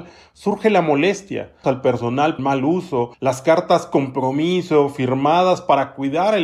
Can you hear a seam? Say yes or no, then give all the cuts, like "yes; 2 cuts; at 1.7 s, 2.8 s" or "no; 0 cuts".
yes; 3 cuts; at 1.6 s, 2.4 s, 3.1 s